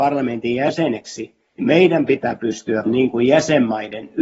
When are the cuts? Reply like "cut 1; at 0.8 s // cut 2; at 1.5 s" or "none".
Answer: cut 1; at 1.6 s // cut 2; at 2.8 s